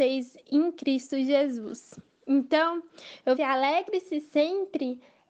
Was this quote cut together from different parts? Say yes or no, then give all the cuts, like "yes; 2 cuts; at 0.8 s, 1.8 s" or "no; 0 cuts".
yes; 1 cut; at 3.4 s